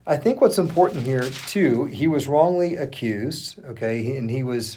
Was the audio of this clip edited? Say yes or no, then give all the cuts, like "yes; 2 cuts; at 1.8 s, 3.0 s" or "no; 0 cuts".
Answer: no; 0 cuts